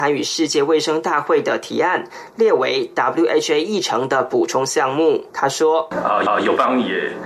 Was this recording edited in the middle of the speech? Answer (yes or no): yes